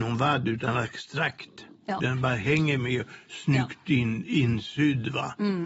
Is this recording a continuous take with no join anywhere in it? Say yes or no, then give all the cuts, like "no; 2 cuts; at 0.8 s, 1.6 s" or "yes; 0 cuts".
yes; 0 cuts